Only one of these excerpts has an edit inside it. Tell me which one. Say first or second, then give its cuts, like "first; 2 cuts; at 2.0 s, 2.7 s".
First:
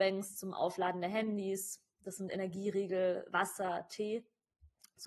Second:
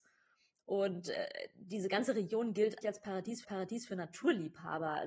second; 2 cuts; at 2.8 s, 3.4 s